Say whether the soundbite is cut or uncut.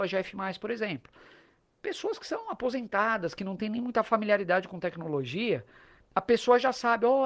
uncut